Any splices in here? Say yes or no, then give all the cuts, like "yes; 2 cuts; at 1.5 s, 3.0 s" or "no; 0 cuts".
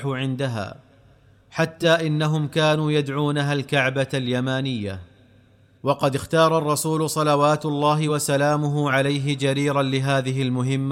no; 0 cuts